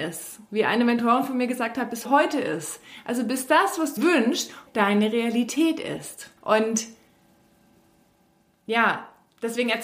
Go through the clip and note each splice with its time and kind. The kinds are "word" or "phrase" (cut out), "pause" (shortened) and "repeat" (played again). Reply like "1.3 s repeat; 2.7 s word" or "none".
2.0 s word; 4.0 s word; 4.7 s word; 6.4 s pause